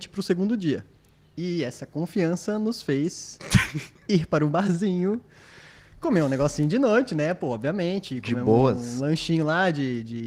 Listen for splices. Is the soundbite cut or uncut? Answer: uncut